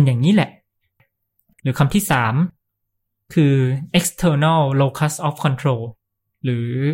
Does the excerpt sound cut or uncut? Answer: uncut